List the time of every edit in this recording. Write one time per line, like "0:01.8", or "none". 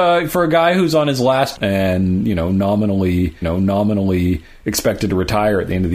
0:01.6
0:03.4